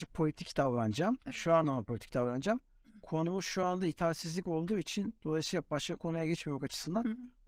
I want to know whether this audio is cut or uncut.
uncut